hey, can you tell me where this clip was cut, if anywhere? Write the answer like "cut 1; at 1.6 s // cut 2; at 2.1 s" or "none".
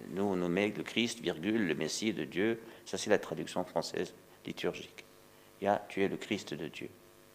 none